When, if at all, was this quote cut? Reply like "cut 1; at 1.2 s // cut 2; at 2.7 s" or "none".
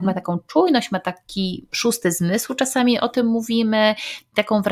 none